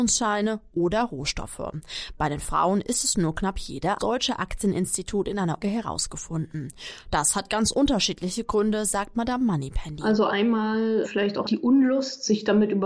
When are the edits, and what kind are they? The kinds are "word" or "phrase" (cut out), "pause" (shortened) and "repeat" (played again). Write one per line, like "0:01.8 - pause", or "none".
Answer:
0:04.0 - phrase
0:05.6 - word
0:11.0 - word
0:11.4 - word